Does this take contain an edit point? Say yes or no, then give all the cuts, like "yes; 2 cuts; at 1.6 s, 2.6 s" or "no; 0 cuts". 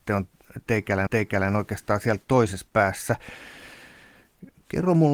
yes; 1 cut; at 1.1 s